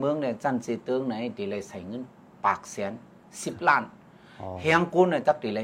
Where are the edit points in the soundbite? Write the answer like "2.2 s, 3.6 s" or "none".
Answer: none